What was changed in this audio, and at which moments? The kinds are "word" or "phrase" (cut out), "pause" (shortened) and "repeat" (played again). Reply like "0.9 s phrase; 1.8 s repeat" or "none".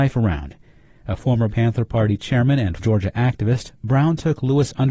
1.5 s word; 2.8 s word